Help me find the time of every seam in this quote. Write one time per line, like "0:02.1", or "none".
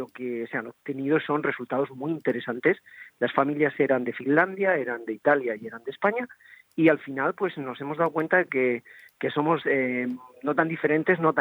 none